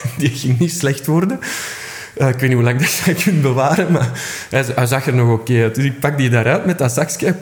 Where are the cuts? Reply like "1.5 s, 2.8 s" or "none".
none